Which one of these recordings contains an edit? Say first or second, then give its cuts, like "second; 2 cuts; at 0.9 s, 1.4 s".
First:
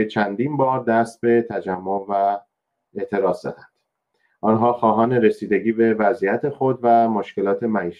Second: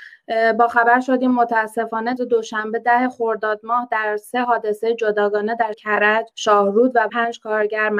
second; 4 cuts; at 2.2 s, 5.7 s, 6.3 s, 7.1 s